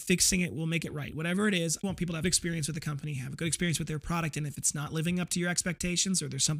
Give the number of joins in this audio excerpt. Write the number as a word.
two